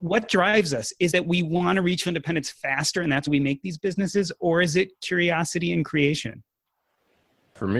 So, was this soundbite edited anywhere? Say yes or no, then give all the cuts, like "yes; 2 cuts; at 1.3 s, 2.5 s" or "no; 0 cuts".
yes; 3 cuts; at 1.1 s, 2.0 s, 3.3 s